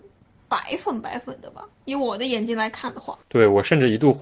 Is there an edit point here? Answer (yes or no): yes